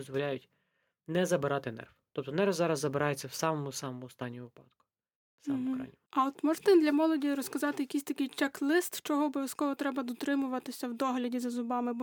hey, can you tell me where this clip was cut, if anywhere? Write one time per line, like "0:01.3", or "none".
0:05.1
0:06.1